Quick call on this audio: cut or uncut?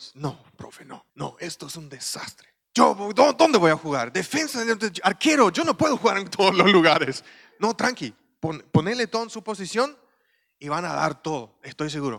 cut